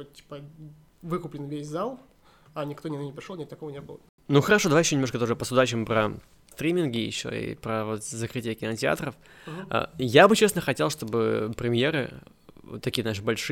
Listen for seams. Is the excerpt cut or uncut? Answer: uncut